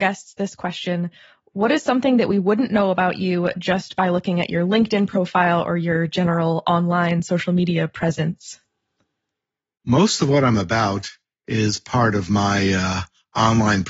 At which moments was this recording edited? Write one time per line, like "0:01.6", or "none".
none